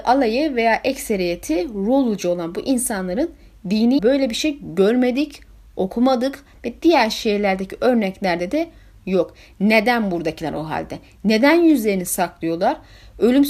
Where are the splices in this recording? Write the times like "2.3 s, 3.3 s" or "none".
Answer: 4.0 s

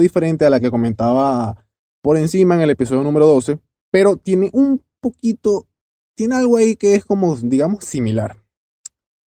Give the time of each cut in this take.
none

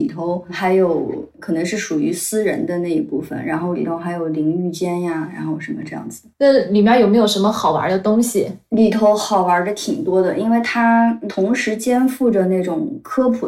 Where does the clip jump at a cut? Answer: 6.3 s

